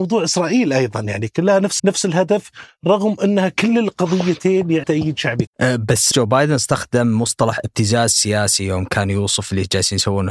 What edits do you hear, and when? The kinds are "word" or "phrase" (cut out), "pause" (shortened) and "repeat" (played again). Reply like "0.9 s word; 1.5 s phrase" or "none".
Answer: 1.8 s word; 4.8 s word; 5.5 s word; 6.1 s word